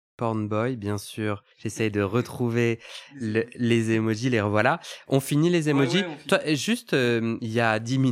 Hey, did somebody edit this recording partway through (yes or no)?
yes